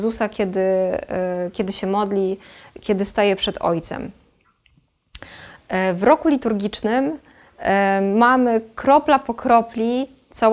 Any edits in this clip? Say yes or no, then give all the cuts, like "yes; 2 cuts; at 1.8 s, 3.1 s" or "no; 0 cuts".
no; 0 cuts